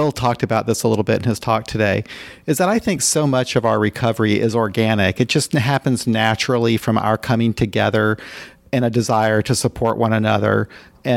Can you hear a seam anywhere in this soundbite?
no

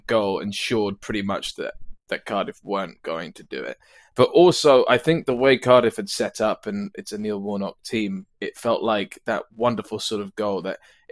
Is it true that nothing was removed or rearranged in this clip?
yes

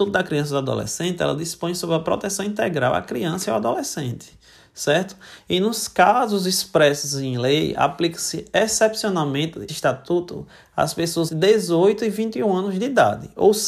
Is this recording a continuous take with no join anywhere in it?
no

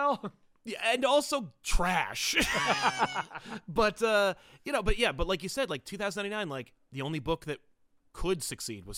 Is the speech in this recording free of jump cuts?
yes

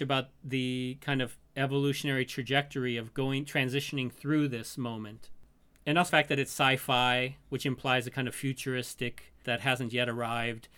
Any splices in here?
yes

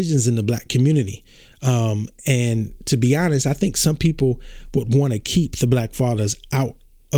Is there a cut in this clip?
no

